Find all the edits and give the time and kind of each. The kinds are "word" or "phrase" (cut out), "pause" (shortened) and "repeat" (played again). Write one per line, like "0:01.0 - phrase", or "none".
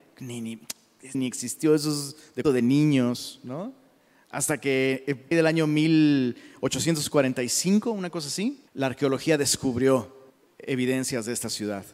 0:01.1 - word
0:02.4 - word
0:05.3 - phrase
0:08.7 - pause
0:10.3 - pause